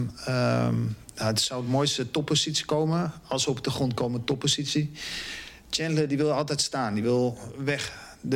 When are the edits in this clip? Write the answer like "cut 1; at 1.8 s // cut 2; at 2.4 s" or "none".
none